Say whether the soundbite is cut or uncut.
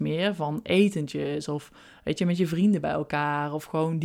uncut